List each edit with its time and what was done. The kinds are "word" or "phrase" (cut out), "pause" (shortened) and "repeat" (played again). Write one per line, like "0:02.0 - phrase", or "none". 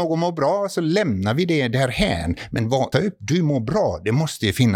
0:02.9 - phrase